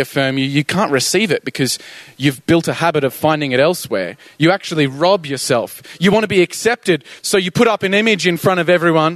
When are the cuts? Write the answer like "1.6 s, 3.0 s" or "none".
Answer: 7.2 s

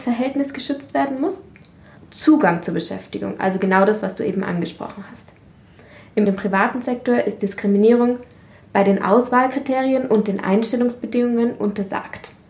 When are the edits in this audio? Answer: 2.0 s, 6.3 s

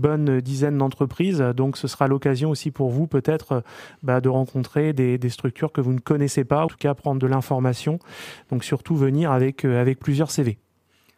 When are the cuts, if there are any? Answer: 6.7 s

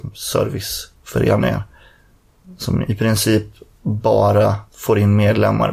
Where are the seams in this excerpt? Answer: 4.7 s

